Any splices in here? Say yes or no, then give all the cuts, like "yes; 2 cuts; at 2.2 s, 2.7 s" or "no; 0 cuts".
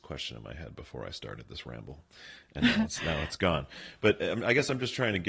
no; 0 cuts